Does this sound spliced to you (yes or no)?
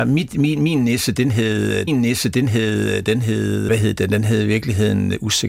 yes